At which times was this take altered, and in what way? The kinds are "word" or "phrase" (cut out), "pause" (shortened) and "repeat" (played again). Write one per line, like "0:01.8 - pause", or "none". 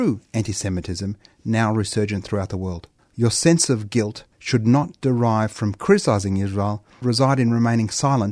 0:03.0 - pause
0:04.3 - pause
0:07.0 - phrase